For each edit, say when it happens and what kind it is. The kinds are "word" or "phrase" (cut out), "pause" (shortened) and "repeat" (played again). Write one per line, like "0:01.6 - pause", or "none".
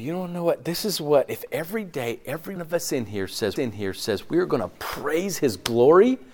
0:02.6 - word
0:03.6 - repeat